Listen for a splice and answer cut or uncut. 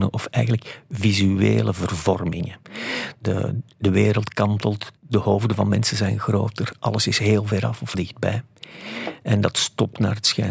cut